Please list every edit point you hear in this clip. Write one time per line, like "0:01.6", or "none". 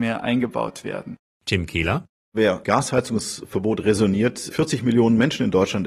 0:02.6
0:04.5